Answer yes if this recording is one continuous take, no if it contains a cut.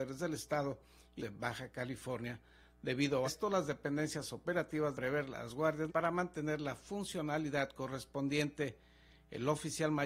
no